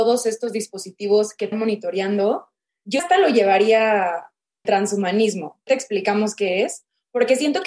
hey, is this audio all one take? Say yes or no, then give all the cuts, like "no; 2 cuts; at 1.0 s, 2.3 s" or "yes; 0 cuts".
no; 4 cuts; at 1.5 s, 3.0 s, 4.6 s, 5.7 s